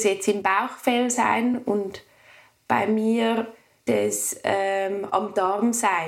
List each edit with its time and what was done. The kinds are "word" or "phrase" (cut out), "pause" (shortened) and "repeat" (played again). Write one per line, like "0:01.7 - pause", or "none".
0:03.9 - word